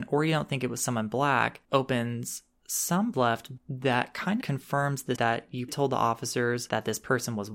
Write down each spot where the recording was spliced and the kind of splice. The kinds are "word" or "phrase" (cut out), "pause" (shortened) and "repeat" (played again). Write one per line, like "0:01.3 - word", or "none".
0:01.6 - word
0:03.1 - word
0:03.6 - word
0:04.4 - word
0:05.2 - word
0:05.7 - word